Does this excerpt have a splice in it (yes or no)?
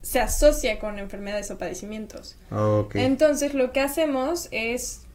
no